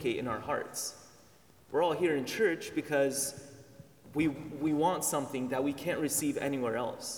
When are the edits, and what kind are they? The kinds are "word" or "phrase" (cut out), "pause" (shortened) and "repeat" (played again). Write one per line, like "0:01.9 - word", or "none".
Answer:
none